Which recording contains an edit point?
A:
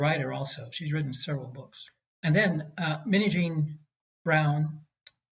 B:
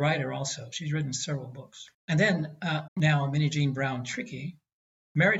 B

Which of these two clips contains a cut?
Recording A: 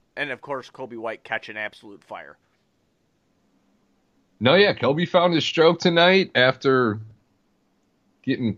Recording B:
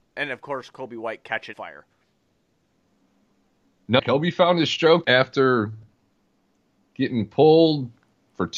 B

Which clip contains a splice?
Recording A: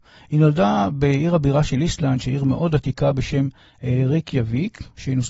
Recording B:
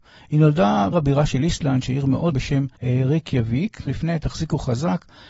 B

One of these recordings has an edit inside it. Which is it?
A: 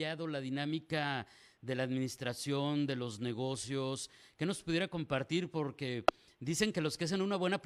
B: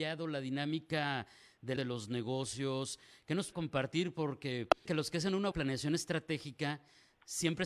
B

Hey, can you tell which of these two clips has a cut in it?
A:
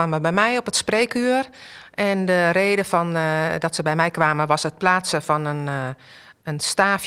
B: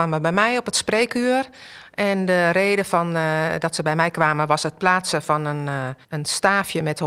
B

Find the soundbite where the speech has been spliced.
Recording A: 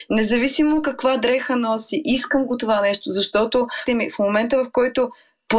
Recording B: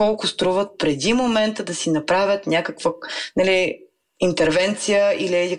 A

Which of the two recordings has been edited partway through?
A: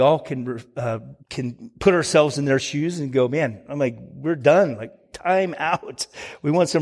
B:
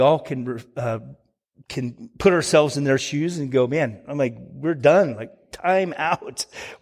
A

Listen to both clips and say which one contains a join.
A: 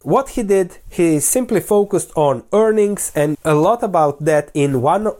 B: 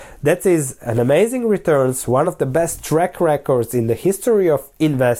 A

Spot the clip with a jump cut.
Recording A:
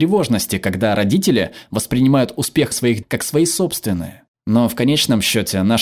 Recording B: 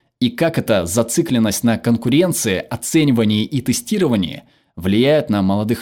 A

